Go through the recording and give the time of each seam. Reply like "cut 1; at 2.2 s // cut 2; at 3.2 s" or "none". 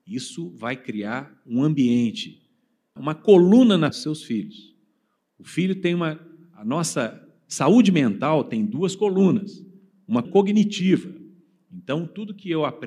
cut 1; at 3.0 s // cut 2; at 3.9 s // cut 3; at 10.2 s